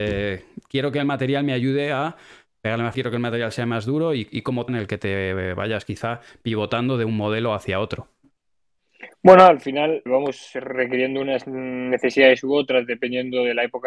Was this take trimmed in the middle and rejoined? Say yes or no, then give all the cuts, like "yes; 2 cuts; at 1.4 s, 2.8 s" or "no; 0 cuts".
yes; 3 cuts; at 2.9 s, 4.7 s, 10.1 s